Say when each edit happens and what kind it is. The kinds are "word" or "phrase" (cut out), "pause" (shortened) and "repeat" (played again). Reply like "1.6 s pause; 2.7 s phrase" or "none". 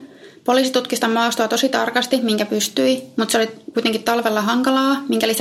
none